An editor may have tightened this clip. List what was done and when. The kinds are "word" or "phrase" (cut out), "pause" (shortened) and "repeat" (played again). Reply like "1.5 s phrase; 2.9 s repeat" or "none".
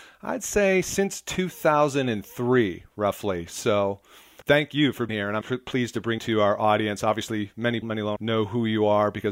4.4 s word; 5.1 s word; 5.4 s word; 6.2 s word; 7.8 s word; 8.2 s word